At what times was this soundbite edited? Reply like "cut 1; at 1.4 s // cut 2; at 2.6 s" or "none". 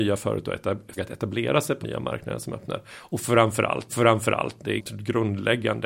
cut 1; at 1.0 s // cut 2; at 1.8 s // cut 3; at 3.9 s // cut 4; at 4.8 s